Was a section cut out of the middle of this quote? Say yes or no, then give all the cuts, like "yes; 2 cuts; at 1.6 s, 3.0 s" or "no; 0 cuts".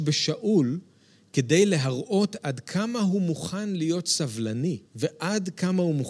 yes; 1 cut; at 4.9 s